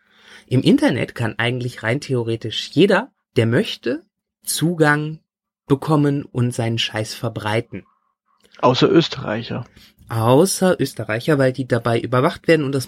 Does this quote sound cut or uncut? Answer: uncut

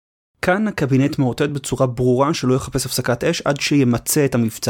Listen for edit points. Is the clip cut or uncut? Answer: uncut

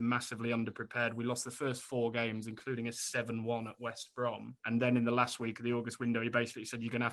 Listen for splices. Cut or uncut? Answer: cut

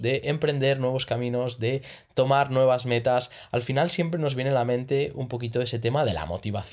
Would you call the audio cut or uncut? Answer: uncut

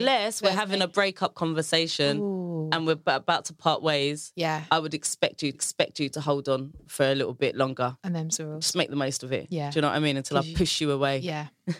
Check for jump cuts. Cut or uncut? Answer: cut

